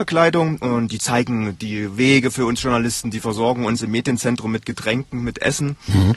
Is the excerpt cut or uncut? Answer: uncut